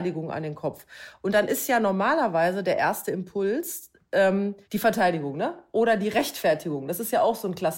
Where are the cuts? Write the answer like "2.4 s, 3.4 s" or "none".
4.6 s